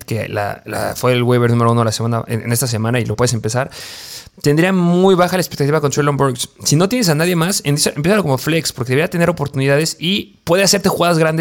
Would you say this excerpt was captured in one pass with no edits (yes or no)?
yes